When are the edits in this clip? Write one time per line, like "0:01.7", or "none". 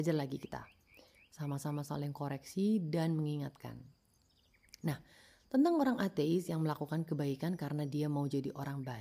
none